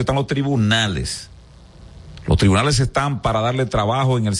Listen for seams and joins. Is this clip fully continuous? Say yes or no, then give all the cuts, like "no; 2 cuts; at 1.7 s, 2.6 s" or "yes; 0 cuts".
yes; 0 cuts